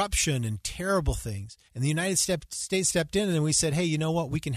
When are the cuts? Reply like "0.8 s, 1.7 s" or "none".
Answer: 1.7 s